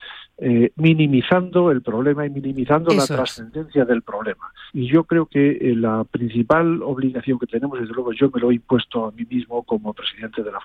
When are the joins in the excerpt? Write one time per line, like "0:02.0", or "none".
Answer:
0:04.7